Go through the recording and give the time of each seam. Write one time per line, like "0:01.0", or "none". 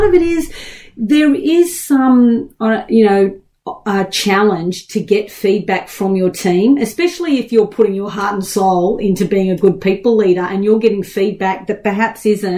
none